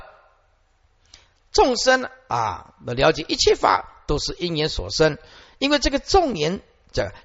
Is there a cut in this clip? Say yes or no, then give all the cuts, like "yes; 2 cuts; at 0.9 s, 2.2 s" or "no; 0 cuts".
no; 0 cuts